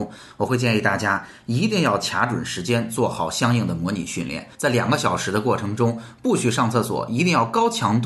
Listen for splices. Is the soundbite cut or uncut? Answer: cut